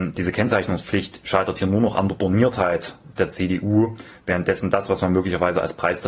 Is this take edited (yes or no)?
no